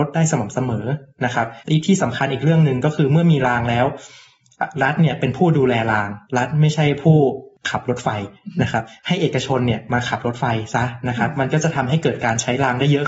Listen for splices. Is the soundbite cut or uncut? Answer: cut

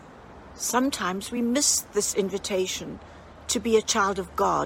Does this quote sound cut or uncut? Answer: uncut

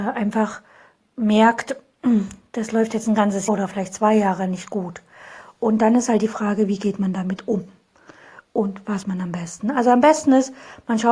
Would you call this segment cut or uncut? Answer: cut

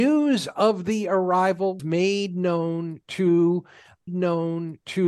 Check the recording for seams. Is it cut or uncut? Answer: cut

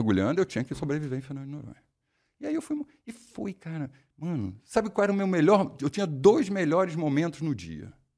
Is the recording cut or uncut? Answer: uncut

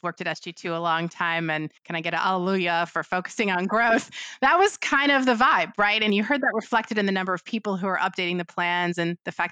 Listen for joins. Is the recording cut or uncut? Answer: cut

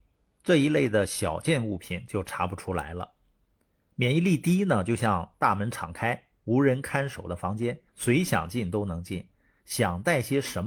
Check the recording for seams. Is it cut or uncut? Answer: cut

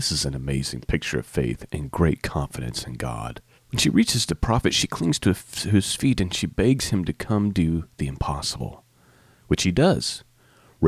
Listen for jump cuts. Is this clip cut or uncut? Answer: cut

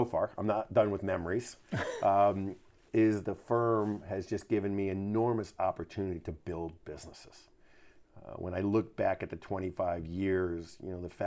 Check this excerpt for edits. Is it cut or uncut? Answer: uncut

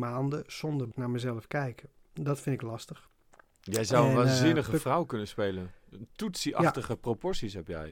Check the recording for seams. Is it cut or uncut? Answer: cut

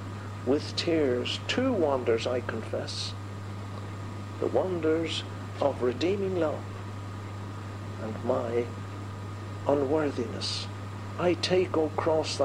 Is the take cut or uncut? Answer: uncut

